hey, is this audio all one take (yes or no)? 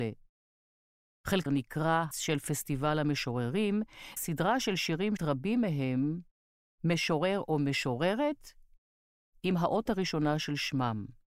no